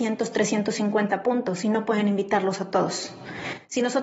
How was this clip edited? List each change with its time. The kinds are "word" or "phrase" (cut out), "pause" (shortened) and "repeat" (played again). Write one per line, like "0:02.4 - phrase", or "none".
none

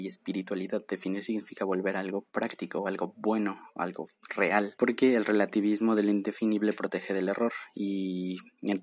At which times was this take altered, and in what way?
none

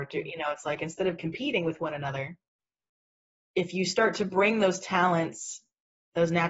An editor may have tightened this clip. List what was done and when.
none

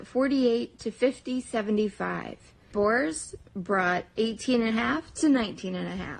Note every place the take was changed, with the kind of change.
0:02.7 - word
0:04.7 - word

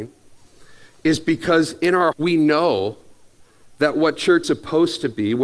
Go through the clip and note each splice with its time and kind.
0:02.1 - word
0:04.4 - word

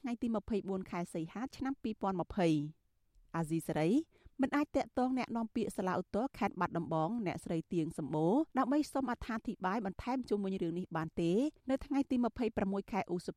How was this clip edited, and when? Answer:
0:08.5 - pause
0:11.6 - pause

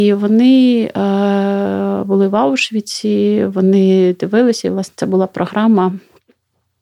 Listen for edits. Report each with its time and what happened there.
none

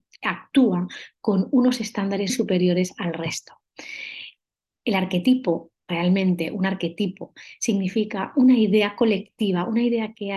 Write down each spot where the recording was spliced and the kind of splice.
0:02.3 - word
0:05.8 - pause

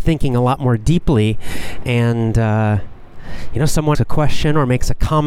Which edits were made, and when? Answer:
0:03.9 - word

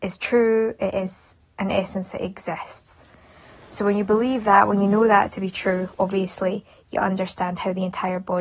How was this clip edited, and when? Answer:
0:01.4 - word

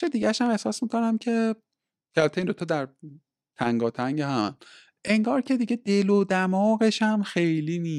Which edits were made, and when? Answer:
none

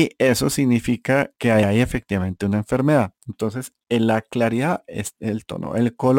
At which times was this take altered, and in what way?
0:01.3 - pause
0:03.8 - pause

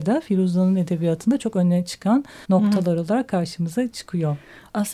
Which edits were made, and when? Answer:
0:02.4 - pause

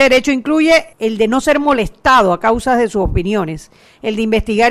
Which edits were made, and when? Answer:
0:00.9 - pause

